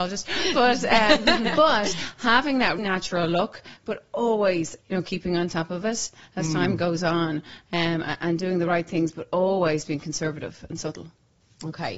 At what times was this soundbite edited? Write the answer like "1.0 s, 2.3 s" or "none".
2.8 s, 4.8 s